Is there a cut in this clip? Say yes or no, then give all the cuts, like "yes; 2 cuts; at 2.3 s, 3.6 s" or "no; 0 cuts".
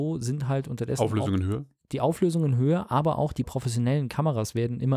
no; 0 cuts